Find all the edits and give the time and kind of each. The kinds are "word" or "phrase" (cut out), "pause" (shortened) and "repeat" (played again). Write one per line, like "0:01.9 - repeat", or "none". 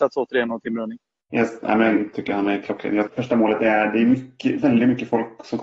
0:02.1 - word
0:03.1 - word